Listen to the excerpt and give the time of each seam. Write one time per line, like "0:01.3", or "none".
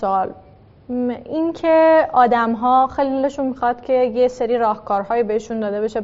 none

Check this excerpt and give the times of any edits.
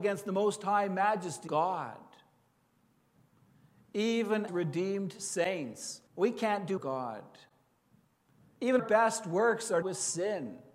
0:01.5
0:04.5
0:06.1
0:06.8
0:08.8
0:09.8

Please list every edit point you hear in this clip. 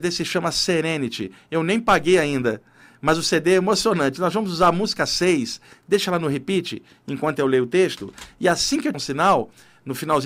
0:08.9

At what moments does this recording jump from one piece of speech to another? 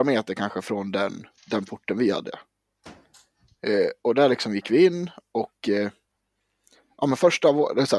0:01.4

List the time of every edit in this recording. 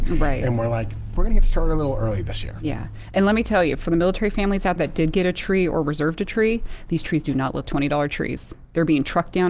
0:04.8
0:07.6

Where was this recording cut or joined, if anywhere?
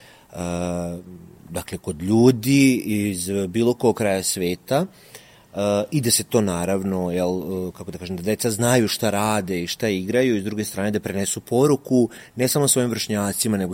none

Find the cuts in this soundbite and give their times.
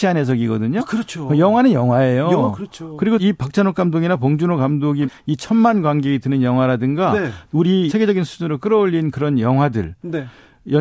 0:03.2
0:05.0
0:07.9

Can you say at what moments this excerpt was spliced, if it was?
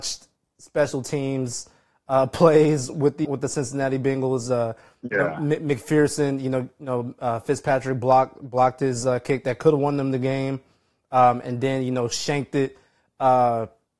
0:03.2

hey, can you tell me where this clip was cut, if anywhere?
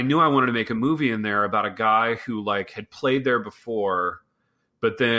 none

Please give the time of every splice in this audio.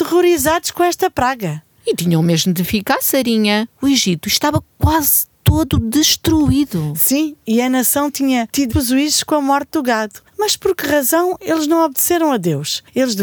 0:08.7

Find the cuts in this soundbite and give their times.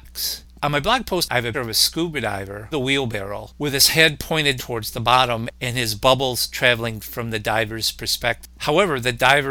0:01.5
0:02.7
0:04.6
0:07.0

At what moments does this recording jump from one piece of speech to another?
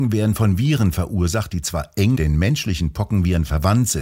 0:02.1

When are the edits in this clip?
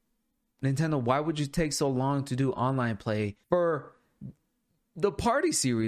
0:03.4

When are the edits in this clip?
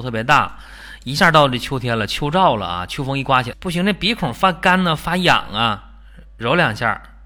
0:03.5

